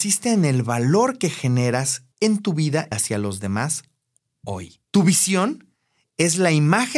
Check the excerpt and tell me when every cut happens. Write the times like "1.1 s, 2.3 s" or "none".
2.1 s, 2.9 s, 4.9 s